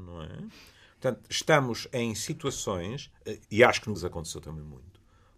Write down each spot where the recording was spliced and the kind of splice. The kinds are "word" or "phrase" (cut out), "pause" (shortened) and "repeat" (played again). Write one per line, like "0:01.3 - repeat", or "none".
0:03.4 - pause
0:03.9 - word